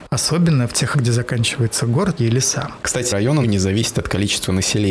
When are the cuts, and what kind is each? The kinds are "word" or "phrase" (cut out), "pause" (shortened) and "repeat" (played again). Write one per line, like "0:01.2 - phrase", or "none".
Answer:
0:00.9 - word
0:02.2 - phrase
0:03.1 - word
0:03.4 - word